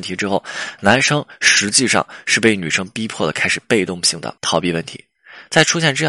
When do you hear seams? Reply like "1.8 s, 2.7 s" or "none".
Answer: 4.4 s